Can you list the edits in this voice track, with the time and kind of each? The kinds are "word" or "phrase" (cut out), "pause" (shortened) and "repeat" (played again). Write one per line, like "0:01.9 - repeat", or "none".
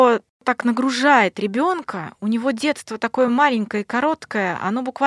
none